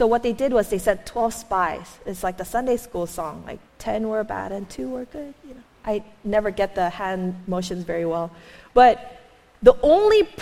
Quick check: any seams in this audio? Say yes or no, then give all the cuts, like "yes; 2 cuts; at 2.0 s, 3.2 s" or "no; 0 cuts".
yes; 1 cut; at 3.7 s